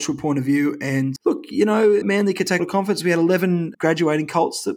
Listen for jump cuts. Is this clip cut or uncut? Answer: cut